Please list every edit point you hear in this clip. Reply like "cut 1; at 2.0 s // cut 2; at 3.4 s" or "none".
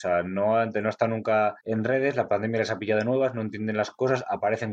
cut 1; at 1.6 s